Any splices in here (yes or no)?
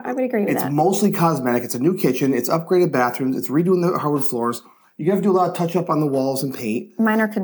no